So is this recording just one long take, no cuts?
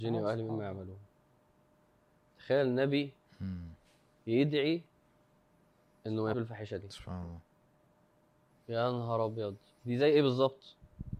no; 1 cut; at 6.3 s

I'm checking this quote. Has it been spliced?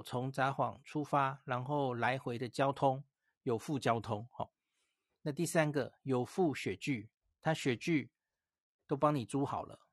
no; 0 cuts

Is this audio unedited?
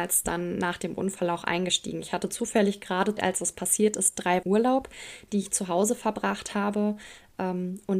no; 2 cuts; at 3.2 s, 4.4 s

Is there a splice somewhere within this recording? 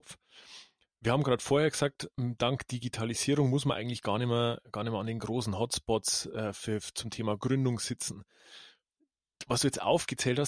no; 0 cuts

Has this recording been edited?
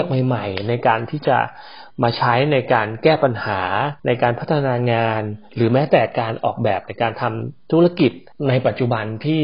yes; 1 cut; at 4.0 s

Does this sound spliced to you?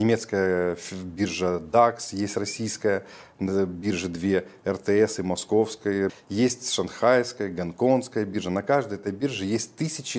no; 0 cuts

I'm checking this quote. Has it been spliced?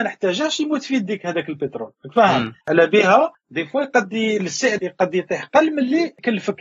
yes; 1 cut; at 2.6 s

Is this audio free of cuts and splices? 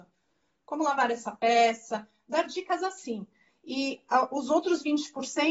yes; 0 cuts

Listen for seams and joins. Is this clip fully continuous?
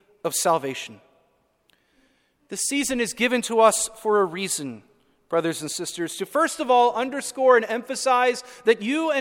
yes; 0 cuts

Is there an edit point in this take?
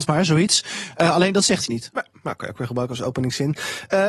yes; 1 cut; at 1.7 s

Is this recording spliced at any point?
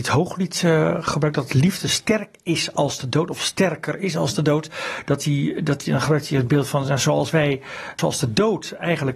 no; 0 cuts

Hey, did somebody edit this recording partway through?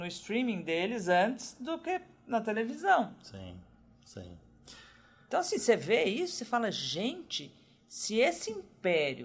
no; 0 cuts

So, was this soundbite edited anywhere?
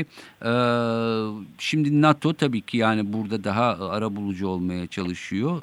no; 0 cuts

